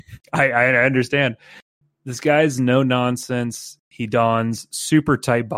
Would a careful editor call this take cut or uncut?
uncut